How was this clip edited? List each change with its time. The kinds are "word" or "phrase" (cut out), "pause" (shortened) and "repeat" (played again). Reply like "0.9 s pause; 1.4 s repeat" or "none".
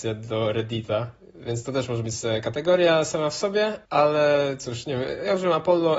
3.8 s pause

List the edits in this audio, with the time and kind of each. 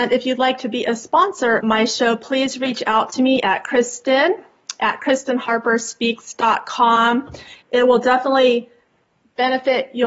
1.6 s word; 7.6 s pause

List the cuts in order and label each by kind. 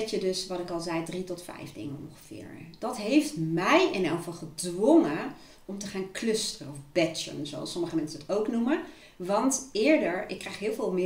none

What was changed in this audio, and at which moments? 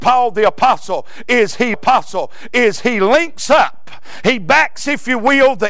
1.7 s repeat

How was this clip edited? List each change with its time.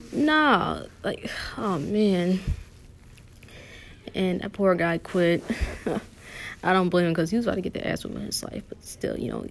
none

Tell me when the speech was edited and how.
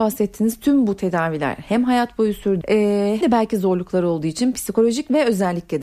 2.6 s word; 3.2 s word

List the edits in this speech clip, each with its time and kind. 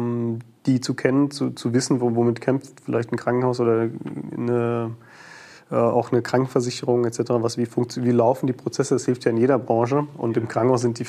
5.6 s pause

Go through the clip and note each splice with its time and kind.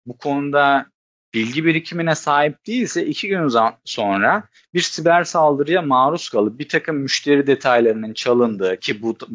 none

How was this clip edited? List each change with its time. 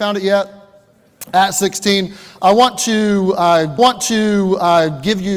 3.8 s repeat

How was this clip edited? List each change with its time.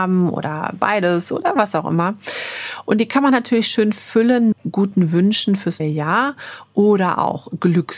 4.5 s phrase; 5.8 s word

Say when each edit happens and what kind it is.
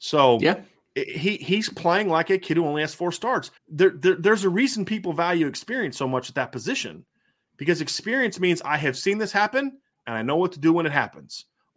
3.6 s pause

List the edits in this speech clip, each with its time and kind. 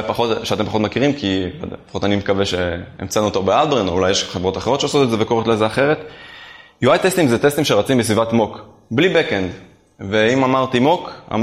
none

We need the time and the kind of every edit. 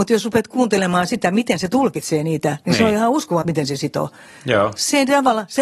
3.4 s word

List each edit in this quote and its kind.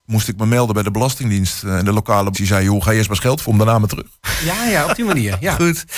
2.3 s word; 3.4 s word

